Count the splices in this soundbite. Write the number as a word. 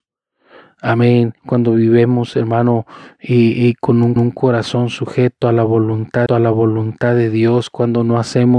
three